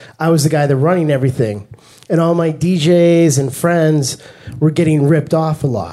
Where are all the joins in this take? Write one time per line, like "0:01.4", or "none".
none